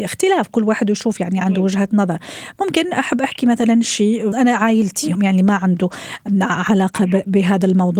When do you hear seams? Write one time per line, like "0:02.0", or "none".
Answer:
0:04.3
0:05.1